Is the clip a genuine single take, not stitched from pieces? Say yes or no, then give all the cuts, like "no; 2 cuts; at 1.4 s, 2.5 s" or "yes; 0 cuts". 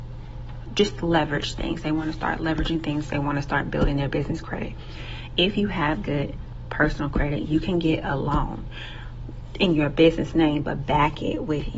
yes; 0 cuts